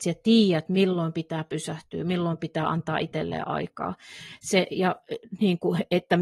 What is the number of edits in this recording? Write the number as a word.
zero